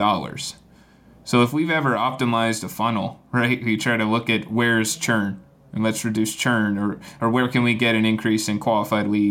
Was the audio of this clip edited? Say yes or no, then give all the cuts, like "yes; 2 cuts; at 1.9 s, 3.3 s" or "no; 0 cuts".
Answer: no; 0 cuts